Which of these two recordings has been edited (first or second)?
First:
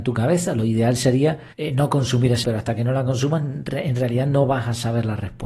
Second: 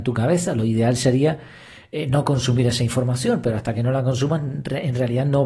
first